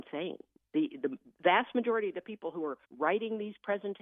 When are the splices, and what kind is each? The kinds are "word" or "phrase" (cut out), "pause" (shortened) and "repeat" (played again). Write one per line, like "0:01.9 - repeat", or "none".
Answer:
0:02.8 - pause